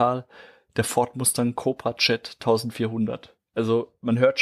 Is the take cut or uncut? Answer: cut